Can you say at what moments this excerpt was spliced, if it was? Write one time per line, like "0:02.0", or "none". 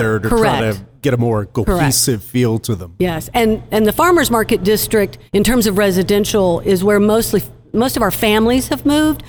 0:05.3